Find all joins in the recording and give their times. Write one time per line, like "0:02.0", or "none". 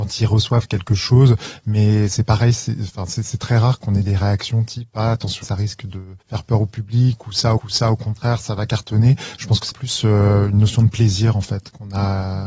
0:05.4
0:06.2
0:07.6
0:09.7